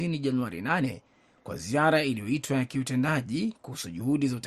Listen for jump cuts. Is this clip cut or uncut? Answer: uncut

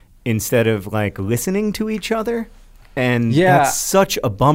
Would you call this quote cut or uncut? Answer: uncut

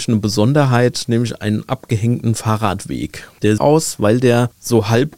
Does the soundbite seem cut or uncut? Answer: cut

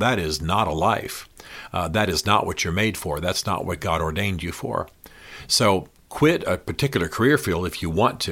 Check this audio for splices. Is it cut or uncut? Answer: uncut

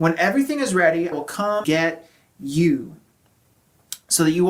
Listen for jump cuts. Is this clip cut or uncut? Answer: cut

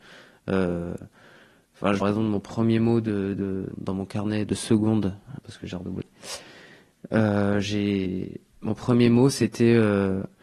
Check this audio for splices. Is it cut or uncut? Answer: cut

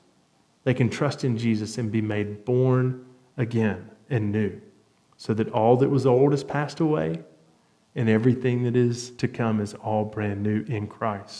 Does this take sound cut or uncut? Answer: cut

